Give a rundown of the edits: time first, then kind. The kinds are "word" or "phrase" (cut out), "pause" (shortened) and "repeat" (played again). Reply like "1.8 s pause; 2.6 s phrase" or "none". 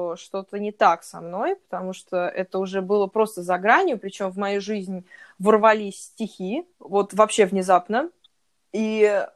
6.7 s pause